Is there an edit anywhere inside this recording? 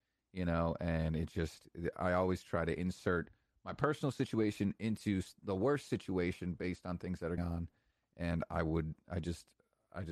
yes; 1 cut; at 7.4 s

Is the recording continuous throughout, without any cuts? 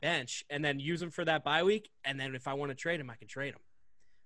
yes; 0 cuts

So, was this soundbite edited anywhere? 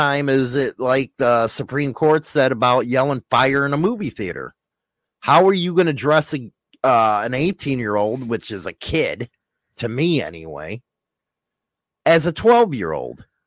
no; 0 cuts

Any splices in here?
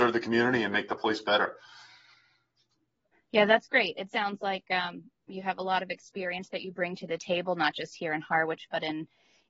no; 0 cuts

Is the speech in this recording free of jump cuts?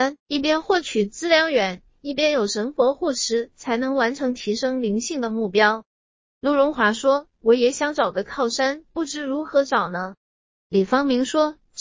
yes; 0 cuts

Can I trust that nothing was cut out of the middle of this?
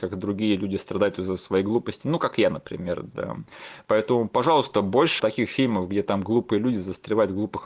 no; 1 cut; at 5.2 s

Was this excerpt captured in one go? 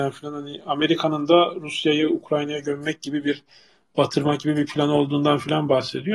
yes; 0 cuts

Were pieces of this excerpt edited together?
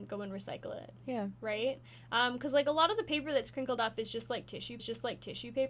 yes; 1 cut; at 4.8 s

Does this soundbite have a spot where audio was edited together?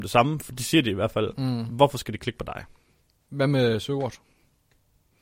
no; 0 cuts

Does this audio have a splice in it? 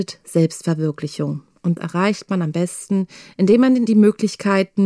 yes; 2 cuts; at 1.8 s, 3.9 s

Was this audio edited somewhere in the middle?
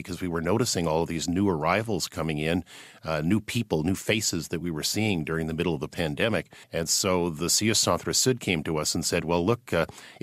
yes; 1 cut; at 6.6 s

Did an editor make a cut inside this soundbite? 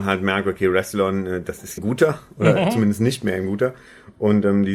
yes; 1 cut; at 1.8 s

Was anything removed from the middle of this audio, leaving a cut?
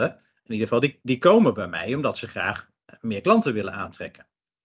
no; 0 cuts

